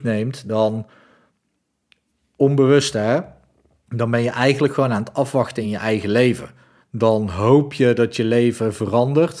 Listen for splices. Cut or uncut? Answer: uncut